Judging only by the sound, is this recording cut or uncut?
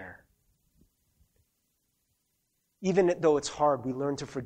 uncut